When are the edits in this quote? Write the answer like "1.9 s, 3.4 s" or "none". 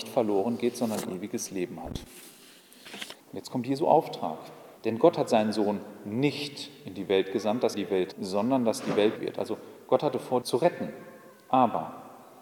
3.2 s, 4.8 s, 7.7 s, 8.1 s, 9.2 s, 10.4 s, 11.3 s